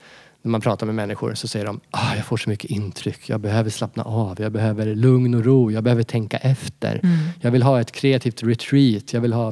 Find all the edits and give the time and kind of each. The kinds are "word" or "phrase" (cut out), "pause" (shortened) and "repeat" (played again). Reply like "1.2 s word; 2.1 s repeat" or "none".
none